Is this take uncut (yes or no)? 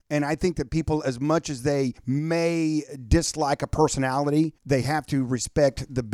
no